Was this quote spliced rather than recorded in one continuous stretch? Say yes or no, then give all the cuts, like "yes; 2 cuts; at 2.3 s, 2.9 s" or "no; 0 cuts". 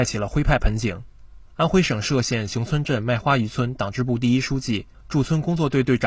yes; 1 cut; at 1.5 s